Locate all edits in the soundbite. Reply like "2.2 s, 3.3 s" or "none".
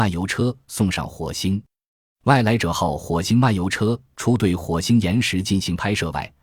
none